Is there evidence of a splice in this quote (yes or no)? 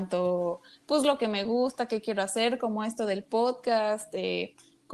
no